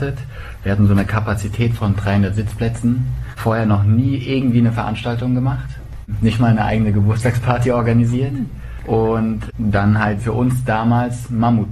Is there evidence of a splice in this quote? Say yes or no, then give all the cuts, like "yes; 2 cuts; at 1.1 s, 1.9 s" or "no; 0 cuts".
yes; 1 cut; at 10.2 s